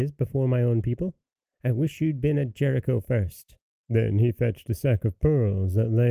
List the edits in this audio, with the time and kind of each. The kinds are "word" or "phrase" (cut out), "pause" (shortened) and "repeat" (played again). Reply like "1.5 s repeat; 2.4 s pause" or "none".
none